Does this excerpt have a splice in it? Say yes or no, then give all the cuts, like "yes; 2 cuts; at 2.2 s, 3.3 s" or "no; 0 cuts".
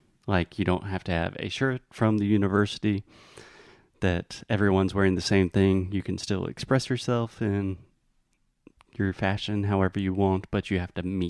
no; 0 cuts